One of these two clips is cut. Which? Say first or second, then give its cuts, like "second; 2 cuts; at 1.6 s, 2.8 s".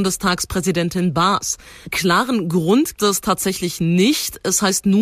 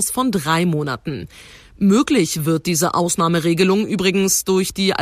first; 2 cuts; at 1.8 s, 3.0 s